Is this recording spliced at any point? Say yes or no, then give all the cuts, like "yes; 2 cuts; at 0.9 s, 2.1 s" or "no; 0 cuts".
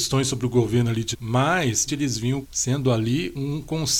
yes; 3 cuts; at 1.1 s, 1.9 s, 2.4 s